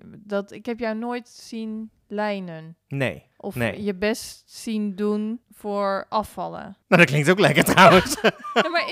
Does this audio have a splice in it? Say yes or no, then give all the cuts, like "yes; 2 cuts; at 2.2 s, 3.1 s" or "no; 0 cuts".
yes; 3 cuts; at 3.3 s, 5.4 s, 6.8 s